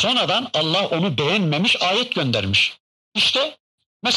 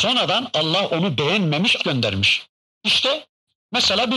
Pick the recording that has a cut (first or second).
second